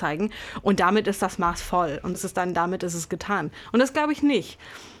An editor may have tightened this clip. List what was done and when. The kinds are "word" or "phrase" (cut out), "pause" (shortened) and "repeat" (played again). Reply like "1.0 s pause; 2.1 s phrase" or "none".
2.1 s word